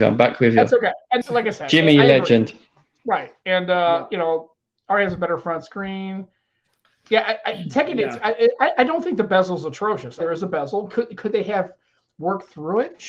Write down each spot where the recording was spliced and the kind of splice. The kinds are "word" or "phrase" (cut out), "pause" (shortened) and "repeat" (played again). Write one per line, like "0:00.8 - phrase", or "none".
0:01.2 - word
0:10.2 - phrase